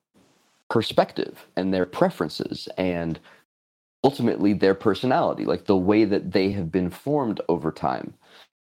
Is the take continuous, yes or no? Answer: yes